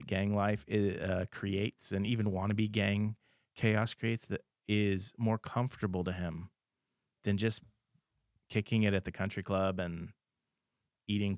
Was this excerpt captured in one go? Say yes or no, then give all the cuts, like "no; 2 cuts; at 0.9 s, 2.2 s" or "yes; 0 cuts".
yes; 0 cuts